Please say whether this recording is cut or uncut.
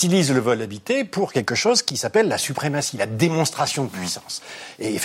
uncut